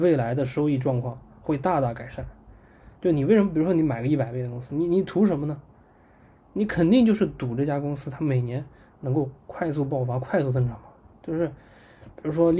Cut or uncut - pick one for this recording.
uncut